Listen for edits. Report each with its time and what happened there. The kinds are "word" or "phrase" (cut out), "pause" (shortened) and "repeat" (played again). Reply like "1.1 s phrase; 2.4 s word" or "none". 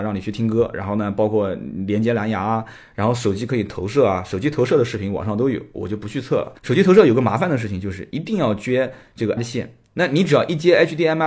6.6 s pause; 9.4 s word